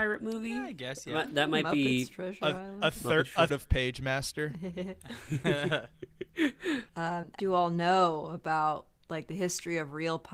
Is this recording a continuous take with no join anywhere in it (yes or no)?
no